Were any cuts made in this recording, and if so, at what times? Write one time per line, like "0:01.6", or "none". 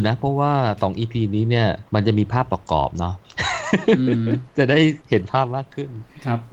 0:01.9
0:05.0